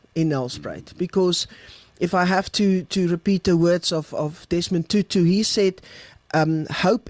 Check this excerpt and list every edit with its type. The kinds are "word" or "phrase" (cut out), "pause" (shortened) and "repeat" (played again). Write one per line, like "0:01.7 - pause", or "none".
none

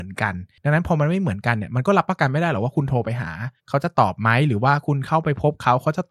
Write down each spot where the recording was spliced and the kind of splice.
0:03.6 - pause

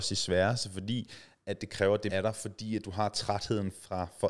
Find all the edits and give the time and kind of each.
0:02.1 - word

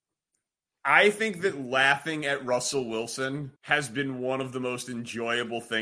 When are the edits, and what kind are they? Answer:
0:03.6 - pause

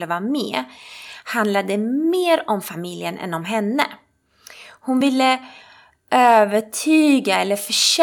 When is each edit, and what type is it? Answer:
none

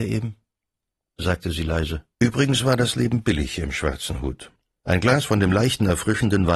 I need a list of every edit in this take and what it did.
0:02.1 - pause

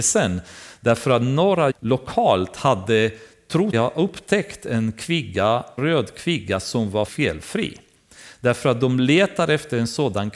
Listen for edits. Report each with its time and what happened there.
0:01.7 - word
0:03.7 - word
0:05.8 - word
0:07.1 - word

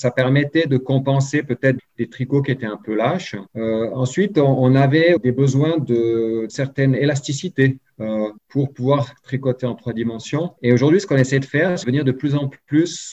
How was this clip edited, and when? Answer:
0:01.8 - word
0:03.5 - pause
0:05.2 - word
0:06.5 - word
0:08.4 - pause
0:10.6 - pause
0:11.8 - word

